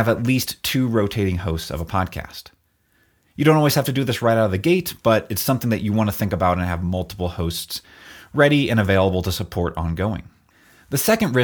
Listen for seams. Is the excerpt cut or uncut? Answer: uncut